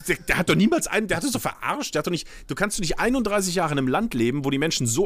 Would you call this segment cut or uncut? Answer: uncut